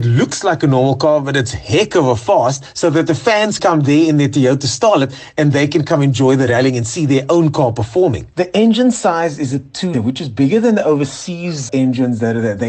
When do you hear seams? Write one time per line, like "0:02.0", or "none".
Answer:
0:03.6
0:09.9
0:11.7

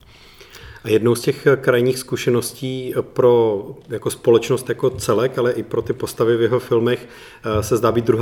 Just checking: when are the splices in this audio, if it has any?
none

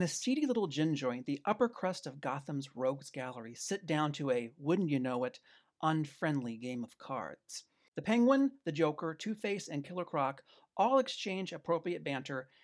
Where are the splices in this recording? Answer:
none

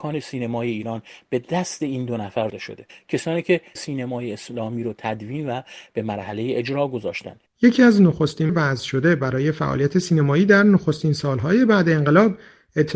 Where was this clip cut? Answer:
0:02.5
0:03.8
0:08.5

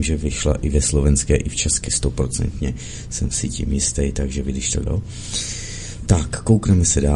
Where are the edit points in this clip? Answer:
0:01.9
0:04.9

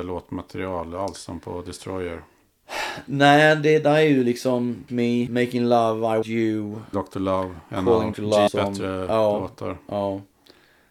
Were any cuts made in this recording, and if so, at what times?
0:04.9
0:05.3
0:06.2
0:06.9
0:08.1
0:08.5

